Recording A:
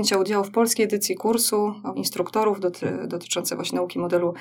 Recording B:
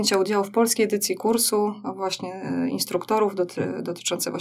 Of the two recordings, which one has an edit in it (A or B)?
A